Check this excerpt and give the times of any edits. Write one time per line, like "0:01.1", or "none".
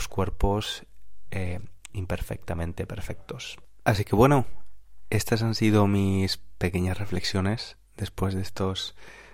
none